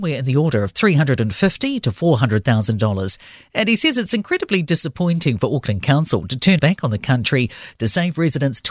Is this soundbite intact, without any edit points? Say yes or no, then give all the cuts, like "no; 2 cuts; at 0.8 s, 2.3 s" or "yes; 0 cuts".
no; 1 cut; at 6.6 s